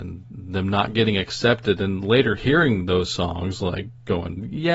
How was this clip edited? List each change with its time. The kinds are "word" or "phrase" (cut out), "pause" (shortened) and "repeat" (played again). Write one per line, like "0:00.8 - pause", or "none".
none

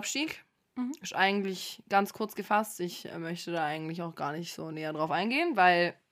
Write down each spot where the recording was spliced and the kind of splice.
none

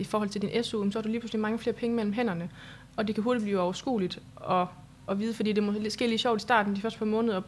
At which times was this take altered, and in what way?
none

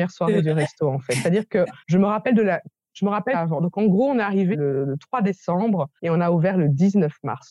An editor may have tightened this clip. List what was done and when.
0:01.8 - pause
0:03.3 - phrase
0:04.5 - word
0:06.0 - pause

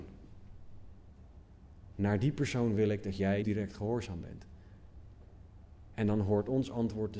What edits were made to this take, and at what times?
0:03.4 - word

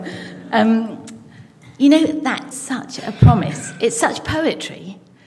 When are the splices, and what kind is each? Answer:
0:02.5 - word

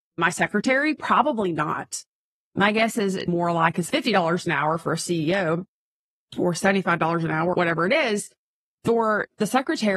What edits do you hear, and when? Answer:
0:03.3 - word
0:03.9 - word
0:07.5 - word

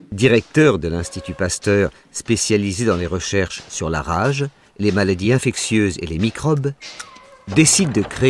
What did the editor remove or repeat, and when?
none

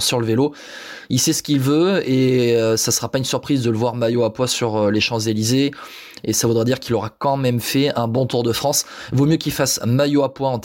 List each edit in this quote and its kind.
none

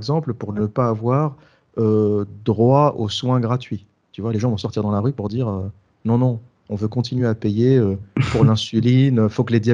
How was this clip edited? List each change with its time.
none

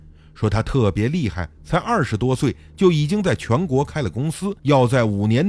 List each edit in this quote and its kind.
0:04.6 - pause

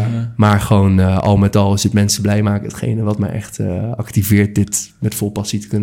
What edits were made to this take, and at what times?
none

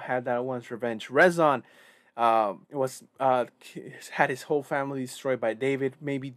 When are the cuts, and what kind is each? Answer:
0:02.6 - pause

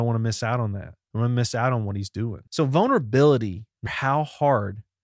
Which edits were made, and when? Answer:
0:01.0 - pause
0:02.5 - pause
0:03.9 - word

